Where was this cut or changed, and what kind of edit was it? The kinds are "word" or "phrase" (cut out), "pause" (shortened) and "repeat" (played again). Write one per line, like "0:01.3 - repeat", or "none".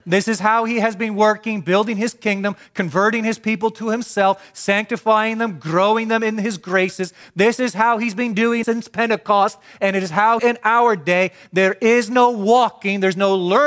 0:08.6 - word
0:10.4 - phrase